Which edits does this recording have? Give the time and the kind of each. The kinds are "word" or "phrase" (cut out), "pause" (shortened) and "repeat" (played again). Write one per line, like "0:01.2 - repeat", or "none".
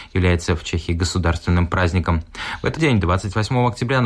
0:02.8 - word